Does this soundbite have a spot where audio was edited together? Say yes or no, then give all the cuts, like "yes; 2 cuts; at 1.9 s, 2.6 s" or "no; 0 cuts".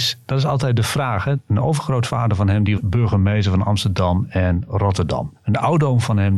yes; 1 cut; at 2.8 s